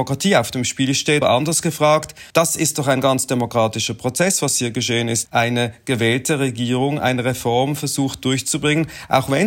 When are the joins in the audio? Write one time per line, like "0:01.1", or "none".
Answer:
0:01.2
0:02.3
0:05.2